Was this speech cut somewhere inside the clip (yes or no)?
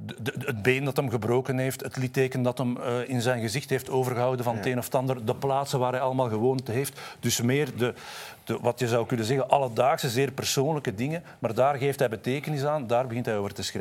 no